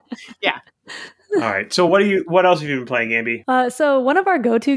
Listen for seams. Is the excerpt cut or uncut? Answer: uncut